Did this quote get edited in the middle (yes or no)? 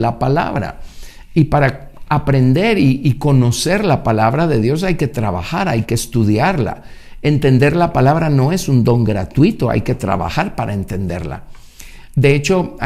no